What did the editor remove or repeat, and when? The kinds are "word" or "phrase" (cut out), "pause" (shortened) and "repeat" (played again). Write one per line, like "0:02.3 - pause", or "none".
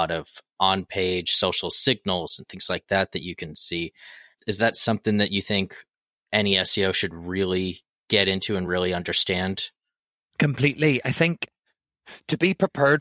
none